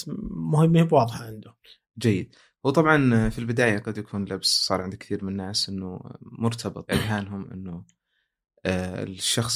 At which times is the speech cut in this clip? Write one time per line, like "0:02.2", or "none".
0:06.9